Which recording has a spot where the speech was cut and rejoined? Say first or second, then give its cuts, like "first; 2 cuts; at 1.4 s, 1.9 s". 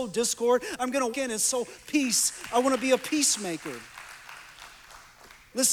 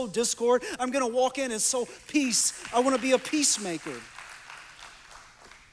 first; 1 cut; at 1.1 s